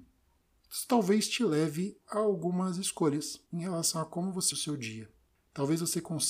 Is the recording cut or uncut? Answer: cut